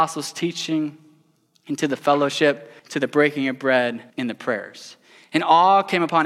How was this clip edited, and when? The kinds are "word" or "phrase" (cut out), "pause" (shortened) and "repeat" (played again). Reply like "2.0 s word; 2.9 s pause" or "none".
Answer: 2.8 s pause; 4.1 s pause